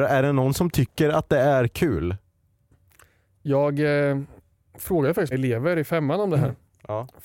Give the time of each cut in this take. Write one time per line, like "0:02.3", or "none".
0:05.3

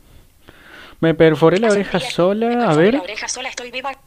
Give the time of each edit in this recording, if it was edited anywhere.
none

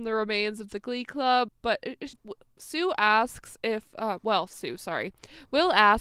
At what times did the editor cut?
0:01.5
0:02.1

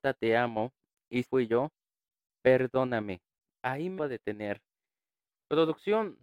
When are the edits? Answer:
0:01.2
0:03.5
0:04.0

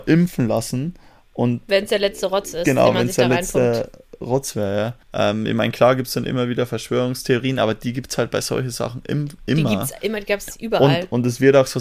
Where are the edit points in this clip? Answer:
0:05.0

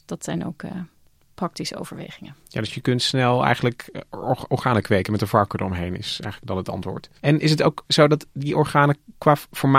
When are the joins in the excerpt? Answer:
0:07.2

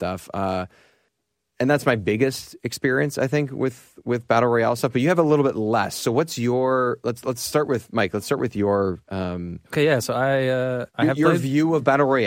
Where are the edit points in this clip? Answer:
0:09.0
0:10.9

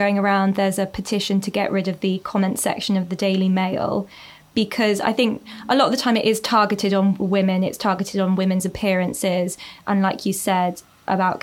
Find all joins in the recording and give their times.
none

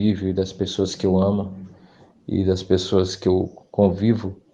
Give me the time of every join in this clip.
none

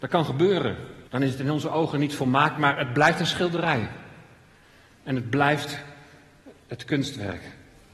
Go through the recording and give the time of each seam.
0:01.1
0:02.6

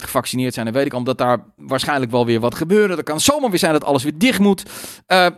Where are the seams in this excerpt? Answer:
0:02.5

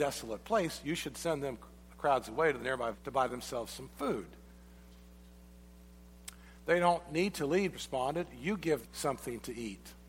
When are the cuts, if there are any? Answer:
0:02.9
0:07.7
0:08.8

